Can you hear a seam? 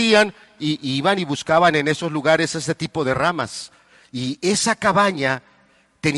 no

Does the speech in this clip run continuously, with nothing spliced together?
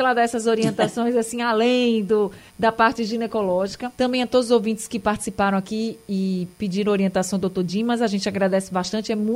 no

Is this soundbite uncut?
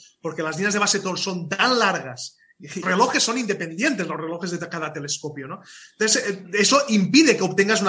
no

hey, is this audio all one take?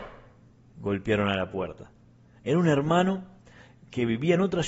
yes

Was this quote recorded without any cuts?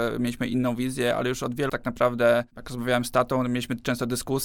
no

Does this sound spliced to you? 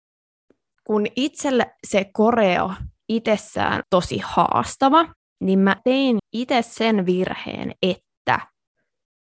yes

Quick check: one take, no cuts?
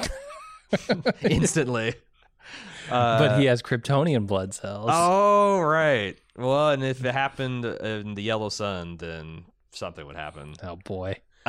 yes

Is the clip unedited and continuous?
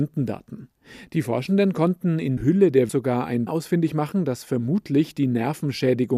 no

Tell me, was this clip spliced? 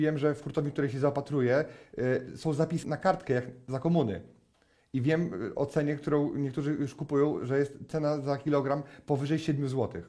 no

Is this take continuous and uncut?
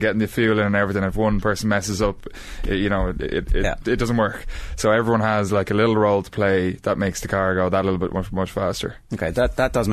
yes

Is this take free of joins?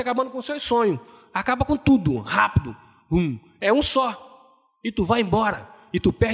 yes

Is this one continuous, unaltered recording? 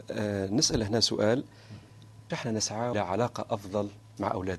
no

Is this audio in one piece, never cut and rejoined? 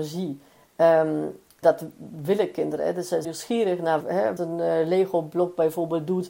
no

